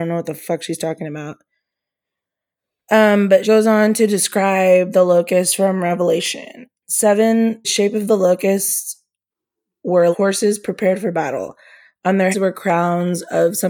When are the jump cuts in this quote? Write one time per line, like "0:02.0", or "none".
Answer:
0:03.4
0:07.6
0:10.1
0:12.3